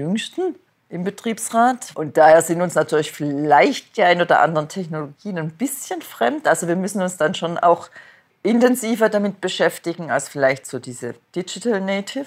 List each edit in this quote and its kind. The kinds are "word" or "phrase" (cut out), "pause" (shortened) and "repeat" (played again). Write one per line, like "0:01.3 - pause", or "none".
none